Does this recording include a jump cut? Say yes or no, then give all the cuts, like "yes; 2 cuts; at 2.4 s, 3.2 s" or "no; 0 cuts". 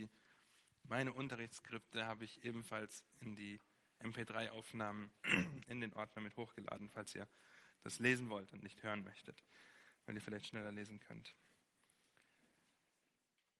no; 0 cuts